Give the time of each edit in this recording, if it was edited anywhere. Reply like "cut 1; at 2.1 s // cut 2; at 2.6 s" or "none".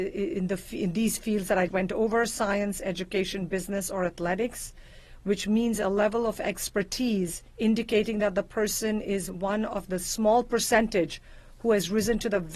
cut 1; at 1.7 s // cut 2; at 7.5 s